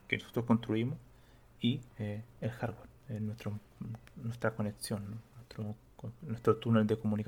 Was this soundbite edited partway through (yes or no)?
yes